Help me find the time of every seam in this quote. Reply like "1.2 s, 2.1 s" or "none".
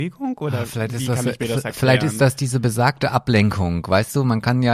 none